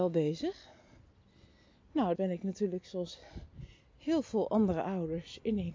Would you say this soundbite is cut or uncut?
cut